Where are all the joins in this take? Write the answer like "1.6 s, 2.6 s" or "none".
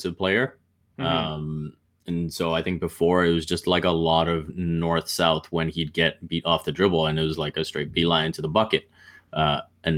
none